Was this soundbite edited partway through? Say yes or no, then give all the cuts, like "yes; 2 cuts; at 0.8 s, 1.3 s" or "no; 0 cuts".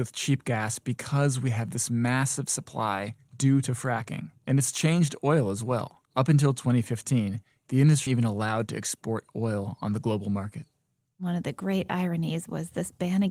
yes; 3 cuts; at 4.4 s, 6.1 s, 8.1 s